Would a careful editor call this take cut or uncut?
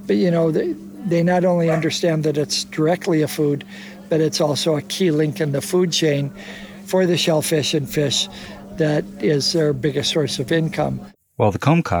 uncut